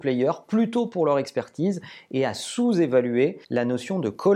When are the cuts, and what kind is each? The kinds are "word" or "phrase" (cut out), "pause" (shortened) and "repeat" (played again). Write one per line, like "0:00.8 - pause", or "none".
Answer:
0:03.4 - pause